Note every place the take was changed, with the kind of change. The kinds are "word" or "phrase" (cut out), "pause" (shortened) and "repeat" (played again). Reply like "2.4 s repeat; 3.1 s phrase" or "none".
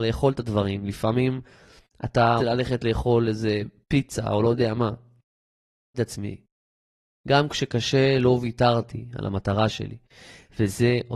2.4 s word; 5.9 s word